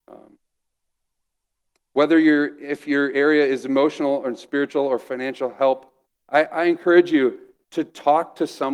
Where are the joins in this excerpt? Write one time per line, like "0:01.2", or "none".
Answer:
none